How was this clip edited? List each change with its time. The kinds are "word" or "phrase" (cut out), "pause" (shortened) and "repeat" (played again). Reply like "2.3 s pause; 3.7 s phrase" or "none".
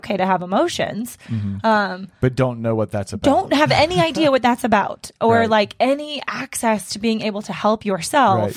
none